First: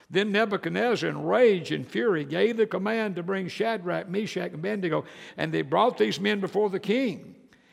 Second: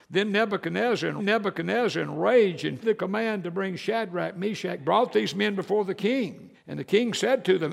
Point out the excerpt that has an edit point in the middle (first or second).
second